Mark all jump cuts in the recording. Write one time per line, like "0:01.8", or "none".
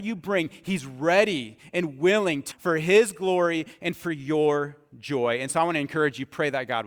0:02.5